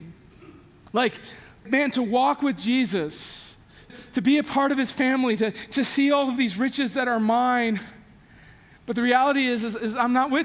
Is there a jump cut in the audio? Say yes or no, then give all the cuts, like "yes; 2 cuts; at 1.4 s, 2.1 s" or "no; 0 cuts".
yes; 2 cuts; at 1.6 s, 3.9 s